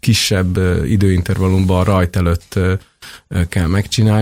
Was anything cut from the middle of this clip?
no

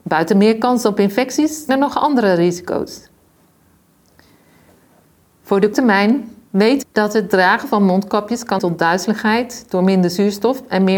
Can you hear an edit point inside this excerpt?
yes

